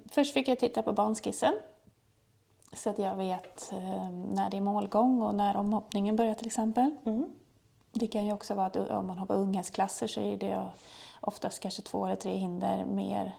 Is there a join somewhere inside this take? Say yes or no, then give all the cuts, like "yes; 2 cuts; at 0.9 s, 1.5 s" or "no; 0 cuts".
no; 0 cuts